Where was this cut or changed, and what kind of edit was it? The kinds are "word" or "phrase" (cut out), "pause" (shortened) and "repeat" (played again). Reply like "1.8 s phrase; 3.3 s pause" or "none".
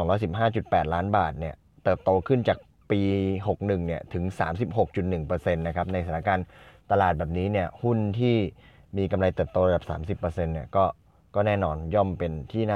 none